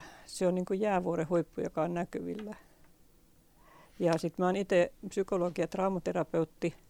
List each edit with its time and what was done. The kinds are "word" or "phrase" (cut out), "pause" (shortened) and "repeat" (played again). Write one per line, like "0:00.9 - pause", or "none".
none

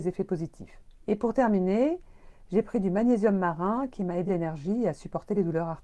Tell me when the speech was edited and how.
0:01.0 - pause
0:04.3 - phrase

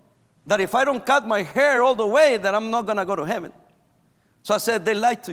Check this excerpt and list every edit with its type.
none

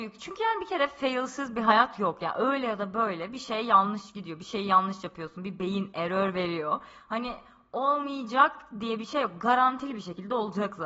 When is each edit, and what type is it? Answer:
none

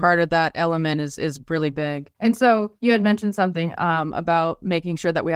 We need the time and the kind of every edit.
0:02.1 - pause
0:02.8 - pause

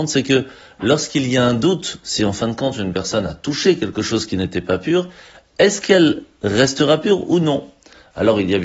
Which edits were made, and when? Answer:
none

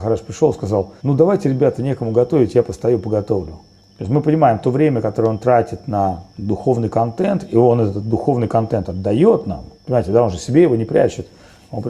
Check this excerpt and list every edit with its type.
0:01.0 - pause
0:03.8 - pause
0:06.3 - pause
0:09.8 - pause

